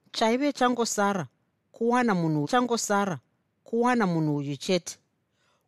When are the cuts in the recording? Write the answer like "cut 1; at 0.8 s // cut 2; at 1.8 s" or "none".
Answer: cut 1; at 2.4 s